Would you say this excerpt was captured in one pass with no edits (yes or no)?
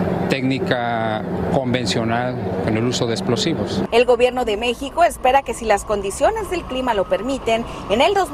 yes